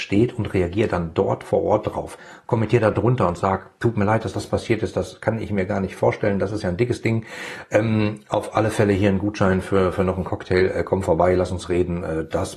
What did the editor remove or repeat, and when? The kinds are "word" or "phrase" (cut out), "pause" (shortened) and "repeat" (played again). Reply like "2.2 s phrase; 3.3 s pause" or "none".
none